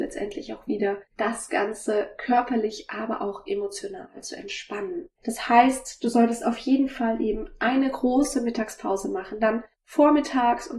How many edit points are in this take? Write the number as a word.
three